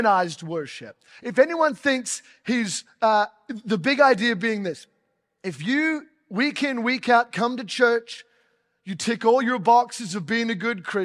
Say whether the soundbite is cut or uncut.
uncut